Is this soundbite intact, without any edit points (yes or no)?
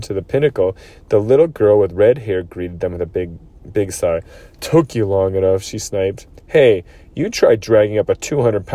yes